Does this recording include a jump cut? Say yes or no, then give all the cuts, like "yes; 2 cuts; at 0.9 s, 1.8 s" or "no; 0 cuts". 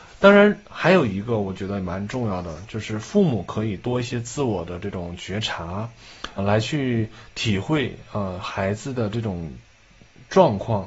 yes; 1 cut; at 6.4 s